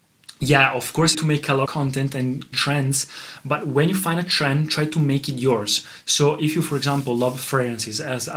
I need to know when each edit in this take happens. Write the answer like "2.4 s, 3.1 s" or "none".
1.1 s, 1.7 s, 2.5 s